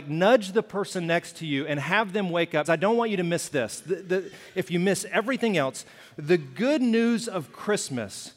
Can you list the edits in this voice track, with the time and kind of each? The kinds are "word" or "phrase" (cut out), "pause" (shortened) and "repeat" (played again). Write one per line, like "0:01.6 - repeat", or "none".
0:02.6 - word